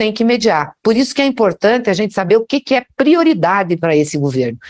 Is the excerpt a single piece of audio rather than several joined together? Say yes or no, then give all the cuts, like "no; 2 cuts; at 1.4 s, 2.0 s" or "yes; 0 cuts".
yes; 0 cuts